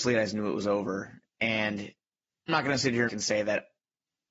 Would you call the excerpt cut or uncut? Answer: cut